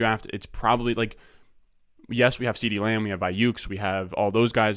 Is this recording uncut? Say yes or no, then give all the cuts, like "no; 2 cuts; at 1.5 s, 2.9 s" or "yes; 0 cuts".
yes; 0 cuts